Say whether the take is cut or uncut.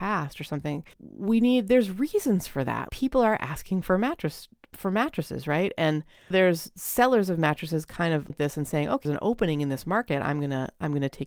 cut